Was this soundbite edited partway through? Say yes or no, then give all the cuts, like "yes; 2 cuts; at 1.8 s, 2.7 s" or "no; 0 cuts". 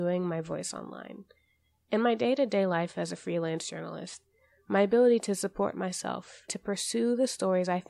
yes; 1 cut; at 6.5 s